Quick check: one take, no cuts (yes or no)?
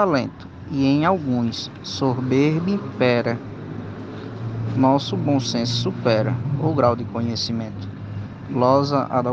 yes